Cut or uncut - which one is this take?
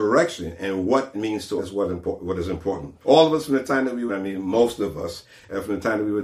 cut